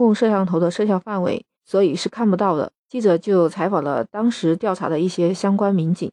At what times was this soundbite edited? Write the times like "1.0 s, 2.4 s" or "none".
1.5 s, 2.8 s